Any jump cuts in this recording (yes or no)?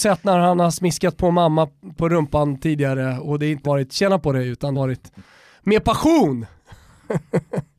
yes